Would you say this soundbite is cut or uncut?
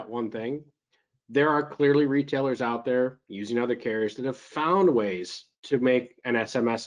cut